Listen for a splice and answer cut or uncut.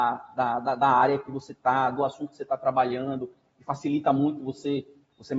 uncut